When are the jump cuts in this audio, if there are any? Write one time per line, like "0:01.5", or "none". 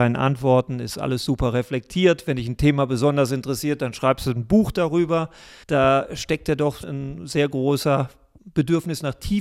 0:05.6
0:06.8
0:08.4

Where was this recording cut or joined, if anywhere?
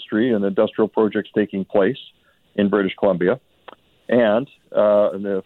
none

